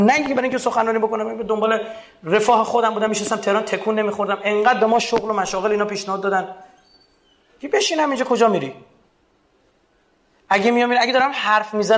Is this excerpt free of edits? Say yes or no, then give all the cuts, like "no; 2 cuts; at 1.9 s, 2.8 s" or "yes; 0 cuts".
yes; 0 cuts